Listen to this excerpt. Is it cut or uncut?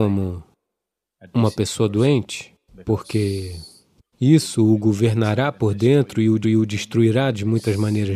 cut